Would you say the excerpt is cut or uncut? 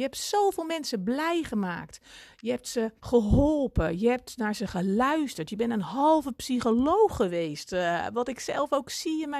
cut